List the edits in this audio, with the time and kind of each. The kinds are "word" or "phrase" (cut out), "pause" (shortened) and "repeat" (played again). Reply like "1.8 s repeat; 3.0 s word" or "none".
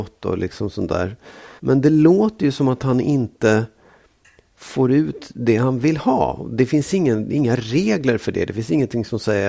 1.6 s pause

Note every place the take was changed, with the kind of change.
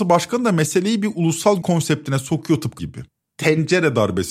1.6 s word; 2.8 s word

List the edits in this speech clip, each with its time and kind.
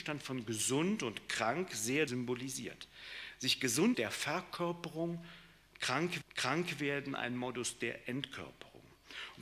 2.1 s word; 3.9 s phrase; 6.2 s repeat

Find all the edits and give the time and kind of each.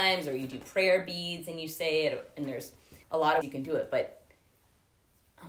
3.0 s pause; 3.4 s word

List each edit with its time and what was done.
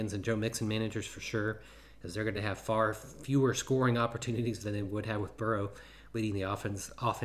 none

